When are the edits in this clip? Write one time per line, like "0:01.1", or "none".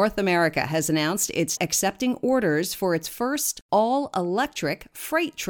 0:01.6